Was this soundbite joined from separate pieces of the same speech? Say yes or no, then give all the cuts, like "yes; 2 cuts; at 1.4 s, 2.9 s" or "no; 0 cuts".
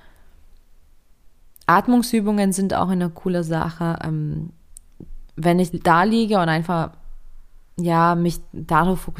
yes; 1 cut; at 5.7 s